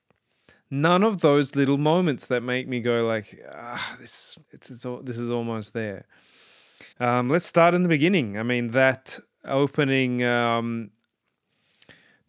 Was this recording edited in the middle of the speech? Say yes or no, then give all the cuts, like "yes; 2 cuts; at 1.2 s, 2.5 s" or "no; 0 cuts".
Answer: yes; 2 cuts; at 4.4 s, 6.9 s